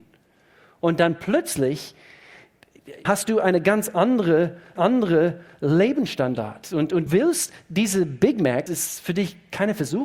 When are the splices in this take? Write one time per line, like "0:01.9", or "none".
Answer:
0:03.1
0:04.8
0:07.1
0:08.7